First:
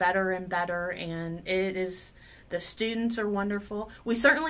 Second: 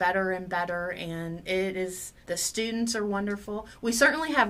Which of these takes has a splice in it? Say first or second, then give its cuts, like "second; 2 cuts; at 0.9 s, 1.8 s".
second; 1 cut; at 2.2 s